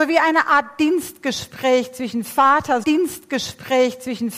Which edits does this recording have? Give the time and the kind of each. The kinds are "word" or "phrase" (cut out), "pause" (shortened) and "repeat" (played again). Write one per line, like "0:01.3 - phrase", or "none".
0:02.8 - repeat